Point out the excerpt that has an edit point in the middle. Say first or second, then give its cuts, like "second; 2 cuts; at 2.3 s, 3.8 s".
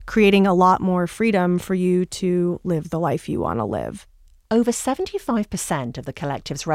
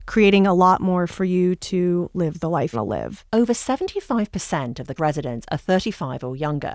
second; 4 cuts; at 1.1 s, 2.7 s, 3.3 s, 5.0 s